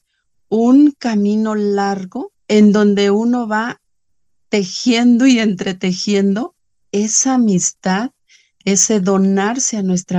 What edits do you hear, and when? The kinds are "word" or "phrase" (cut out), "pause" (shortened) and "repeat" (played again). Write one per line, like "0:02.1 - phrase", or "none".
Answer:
0:02.4 - pause